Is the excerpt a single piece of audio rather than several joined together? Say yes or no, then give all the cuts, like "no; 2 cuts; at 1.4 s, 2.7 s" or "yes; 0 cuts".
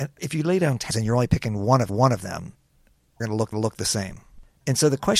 no; 4 cuts; at 0.9 s, 1.9 s, 3.2 s, 3.5 s